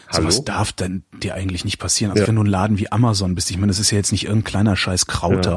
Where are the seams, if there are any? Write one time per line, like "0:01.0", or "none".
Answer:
0:02.3
0:04.4

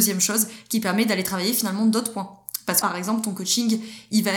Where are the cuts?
0:02.8

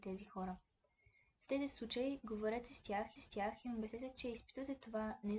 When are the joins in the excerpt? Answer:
0:03.2

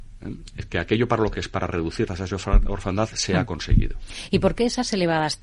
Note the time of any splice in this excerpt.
0:01.3
0:02.1

